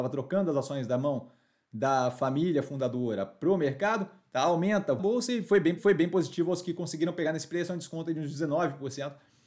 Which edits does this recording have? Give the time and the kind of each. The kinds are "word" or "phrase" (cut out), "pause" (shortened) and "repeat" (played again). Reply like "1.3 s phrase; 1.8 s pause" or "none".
5.0 s phrase; 5.8 s repeat